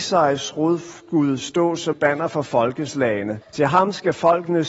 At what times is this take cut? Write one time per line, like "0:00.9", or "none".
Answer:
0:01.9
0:03.4

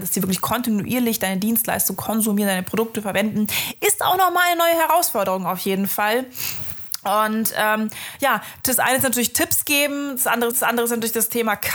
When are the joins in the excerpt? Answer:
0:10.5

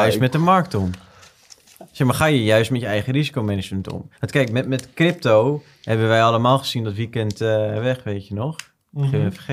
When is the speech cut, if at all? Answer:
0:04.1

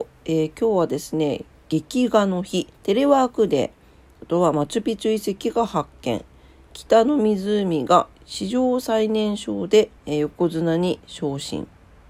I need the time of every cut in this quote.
0:02.7
0:08.1
0:10.0

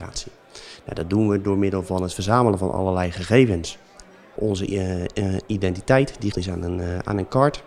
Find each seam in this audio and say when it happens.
0:04.4
0:06.3

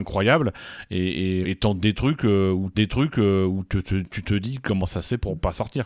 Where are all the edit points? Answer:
0:01.4
0:02.7

